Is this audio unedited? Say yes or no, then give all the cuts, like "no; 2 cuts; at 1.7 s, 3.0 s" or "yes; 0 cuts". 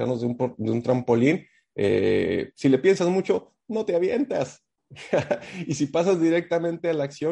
yes; 0 cuts